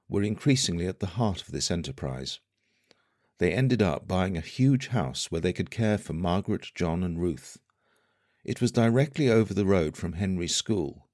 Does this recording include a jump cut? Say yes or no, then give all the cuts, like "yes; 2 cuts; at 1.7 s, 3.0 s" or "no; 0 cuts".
no; 0 cuts